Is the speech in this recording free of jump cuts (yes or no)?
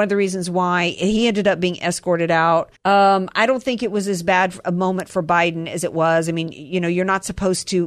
no